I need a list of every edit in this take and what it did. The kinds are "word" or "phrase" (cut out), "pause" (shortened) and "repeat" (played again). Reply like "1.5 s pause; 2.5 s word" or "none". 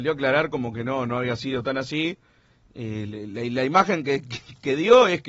none